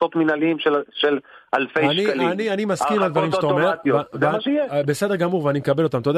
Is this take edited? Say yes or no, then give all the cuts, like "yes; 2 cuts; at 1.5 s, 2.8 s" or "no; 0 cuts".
no; 0 cuts